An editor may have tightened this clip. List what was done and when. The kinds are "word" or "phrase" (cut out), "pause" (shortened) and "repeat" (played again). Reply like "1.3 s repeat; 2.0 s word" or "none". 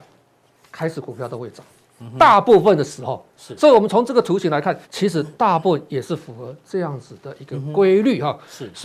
4.8 s pause